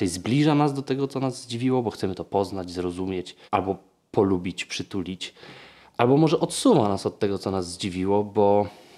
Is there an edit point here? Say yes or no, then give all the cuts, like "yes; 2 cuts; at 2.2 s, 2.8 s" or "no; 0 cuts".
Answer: yes; 1 cut; at 3.5 s